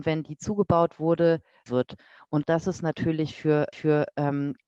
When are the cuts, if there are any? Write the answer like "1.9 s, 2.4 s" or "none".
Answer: 1.7 s, 2.4 s, 3.7 s